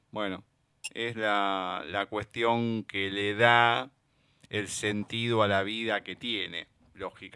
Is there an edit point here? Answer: no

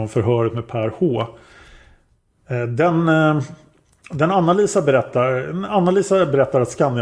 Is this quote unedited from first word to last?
yes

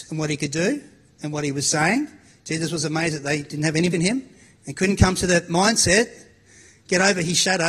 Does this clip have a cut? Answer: yes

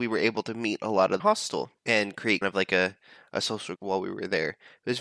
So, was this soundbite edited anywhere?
yes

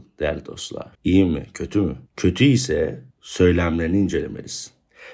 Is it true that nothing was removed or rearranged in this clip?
no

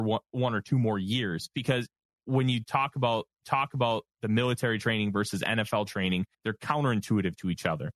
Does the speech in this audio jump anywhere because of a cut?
yes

